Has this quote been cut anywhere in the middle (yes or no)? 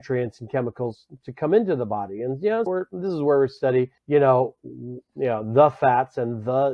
yes